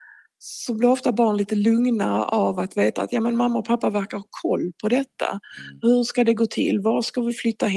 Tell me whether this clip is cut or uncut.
uncut